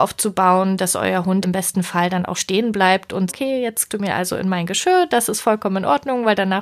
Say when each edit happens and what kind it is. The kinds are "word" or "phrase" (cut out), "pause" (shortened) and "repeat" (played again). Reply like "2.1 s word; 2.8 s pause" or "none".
1.4 s word; 2.3 s word; 3.3 s phrase; 3.9 s word